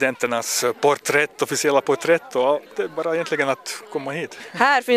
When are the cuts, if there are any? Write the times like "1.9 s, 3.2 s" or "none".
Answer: 2.7 s